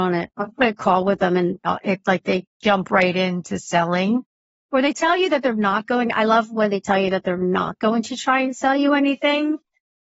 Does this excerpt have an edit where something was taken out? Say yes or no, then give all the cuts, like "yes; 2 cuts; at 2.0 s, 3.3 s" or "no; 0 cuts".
no; 0 cuts